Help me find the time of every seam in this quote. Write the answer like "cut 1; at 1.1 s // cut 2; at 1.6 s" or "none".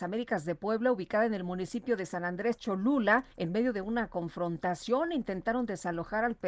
cut 1; at 3.3 s